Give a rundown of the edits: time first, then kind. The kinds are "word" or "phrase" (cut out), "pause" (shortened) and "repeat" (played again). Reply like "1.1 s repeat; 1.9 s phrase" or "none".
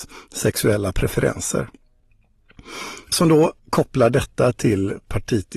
3.1 s word; 3.6 s pause